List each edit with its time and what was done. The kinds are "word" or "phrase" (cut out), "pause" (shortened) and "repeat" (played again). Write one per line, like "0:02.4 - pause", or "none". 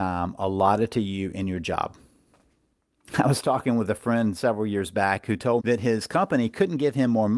0:05.6 - word